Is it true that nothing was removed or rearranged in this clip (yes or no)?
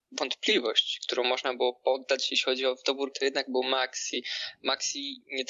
no